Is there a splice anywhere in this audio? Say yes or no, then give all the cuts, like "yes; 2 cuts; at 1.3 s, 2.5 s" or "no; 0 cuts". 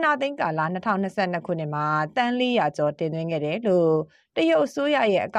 no; 0 cuts